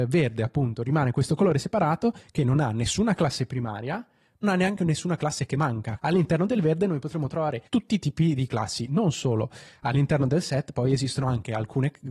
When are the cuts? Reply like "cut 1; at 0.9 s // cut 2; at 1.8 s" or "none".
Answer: cut 1; at 4.4 s // cut 2; at 6.0 s // cut 3; at 7.7 s // cut 4; at 8.5 s